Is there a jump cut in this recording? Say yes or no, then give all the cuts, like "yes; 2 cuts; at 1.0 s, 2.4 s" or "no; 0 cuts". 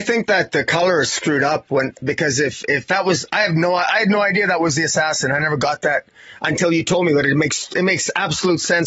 no; 0 cuts